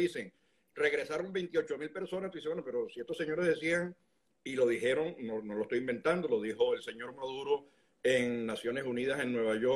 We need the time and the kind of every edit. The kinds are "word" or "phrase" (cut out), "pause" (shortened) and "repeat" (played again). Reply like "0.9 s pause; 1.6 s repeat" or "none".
none